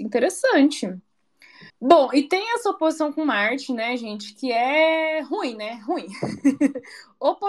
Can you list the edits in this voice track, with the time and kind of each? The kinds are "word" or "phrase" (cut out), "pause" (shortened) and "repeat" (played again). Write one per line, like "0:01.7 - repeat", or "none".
0:01.7 - pause

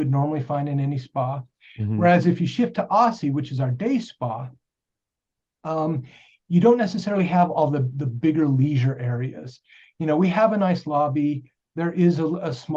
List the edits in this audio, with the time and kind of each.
none

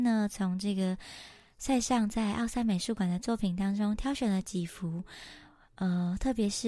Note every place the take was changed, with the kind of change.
none

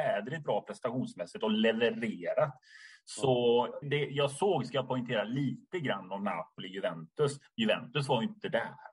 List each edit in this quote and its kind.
0:03.8 - word

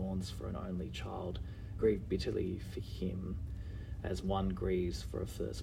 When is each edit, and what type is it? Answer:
0:01.8 - word

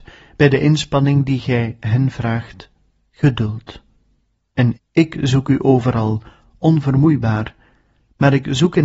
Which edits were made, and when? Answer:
0:04.8 - word

